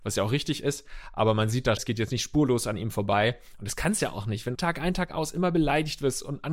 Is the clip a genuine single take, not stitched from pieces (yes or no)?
no